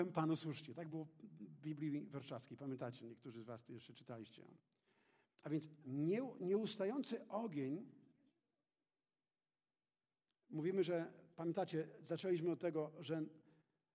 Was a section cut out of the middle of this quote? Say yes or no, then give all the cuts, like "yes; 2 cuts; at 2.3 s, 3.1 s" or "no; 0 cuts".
no; 0 cuts